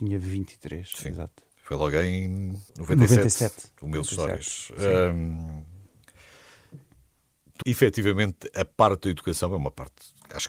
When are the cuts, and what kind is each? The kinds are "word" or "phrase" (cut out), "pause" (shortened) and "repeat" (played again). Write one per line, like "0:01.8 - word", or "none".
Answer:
0:01.5 - pause
0:02.7 - pause
0:07.6 - word